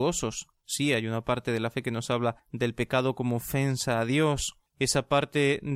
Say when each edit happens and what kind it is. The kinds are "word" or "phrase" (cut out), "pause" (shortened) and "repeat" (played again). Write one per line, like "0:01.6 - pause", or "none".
0:02.4 - pause
0:04.7 - pause